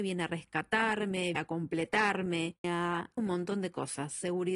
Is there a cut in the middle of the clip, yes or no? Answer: yes